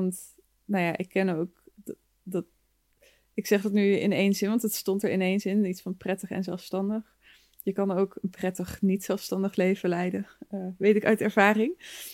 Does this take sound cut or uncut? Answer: uncut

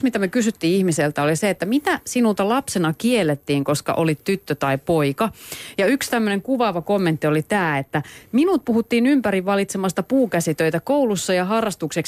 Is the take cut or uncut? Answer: uncut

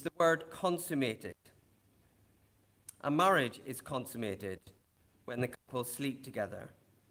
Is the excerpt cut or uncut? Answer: uncut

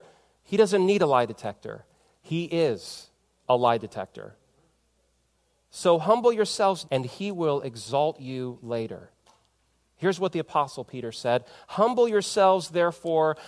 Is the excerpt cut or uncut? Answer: cut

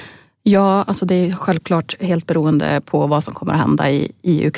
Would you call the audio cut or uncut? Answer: uncut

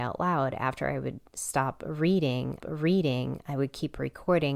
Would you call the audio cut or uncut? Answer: cut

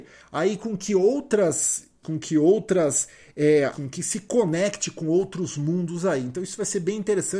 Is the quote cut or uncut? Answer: cut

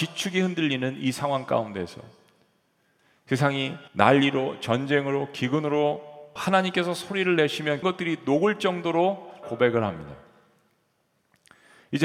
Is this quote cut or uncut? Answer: cut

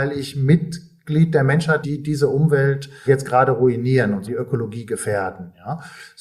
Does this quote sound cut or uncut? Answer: cut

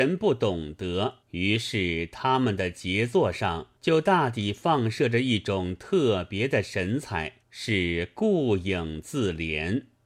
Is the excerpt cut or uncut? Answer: cut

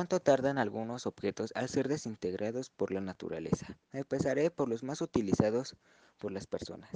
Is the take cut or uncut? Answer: cut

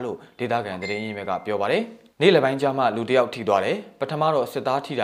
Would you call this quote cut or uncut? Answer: cut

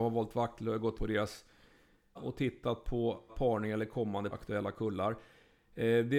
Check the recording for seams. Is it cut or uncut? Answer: cut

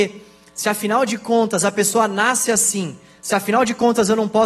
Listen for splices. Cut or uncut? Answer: uncut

